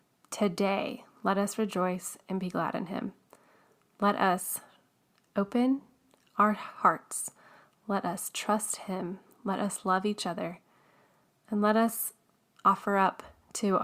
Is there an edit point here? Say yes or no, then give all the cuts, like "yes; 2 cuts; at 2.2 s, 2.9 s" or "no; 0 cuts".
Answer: no; 0 cuts